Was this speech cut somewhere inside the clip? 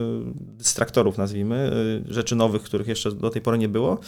no; 0 cuts

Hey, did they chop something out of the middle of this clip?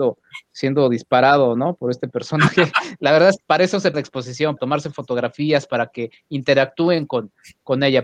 yes; 3 cuts; at 3.4 s, 3.9 s, 4.6 s

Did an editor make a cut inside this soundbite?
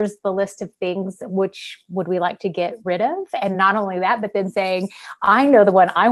no; 0 cuts

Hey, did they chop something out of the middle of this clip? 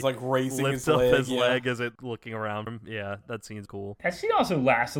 yes; 3 cuts; at 2.7 s, 3.2 s, 3.7 s

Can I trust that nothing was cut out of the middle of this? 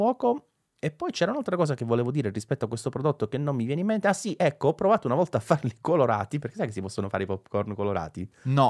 yes; 0 cuts

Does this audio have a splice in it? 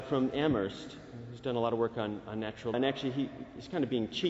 yes; 1 cut; at 2.7 s

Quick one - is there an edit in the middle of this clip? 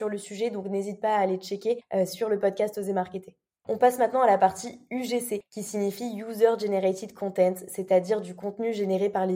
no; 0 cuts

